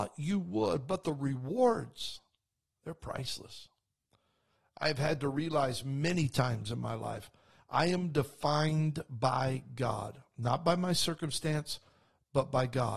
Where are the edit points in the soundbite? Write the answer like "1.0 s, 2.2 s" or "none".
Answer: none